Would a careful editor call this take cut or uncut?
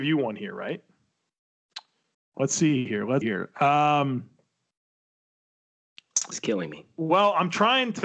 cut